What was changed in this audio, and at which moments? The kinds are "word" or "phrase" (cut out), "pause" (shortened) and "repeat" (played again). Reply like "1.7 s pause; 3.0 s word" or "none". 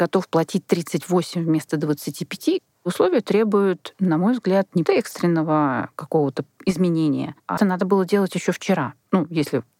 4.9 s word; 7.6 s word